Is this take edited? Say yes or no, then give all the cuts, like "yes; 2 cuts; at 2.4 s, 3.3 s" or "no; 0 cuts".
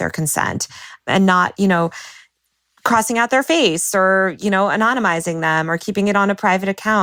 no; 0 cuts